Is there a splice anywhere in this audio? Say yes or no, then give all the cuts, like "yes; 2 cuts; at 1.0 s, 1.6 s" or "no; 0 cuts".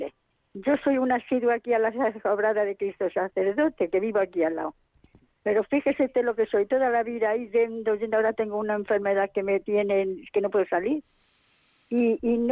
no; 0 cuts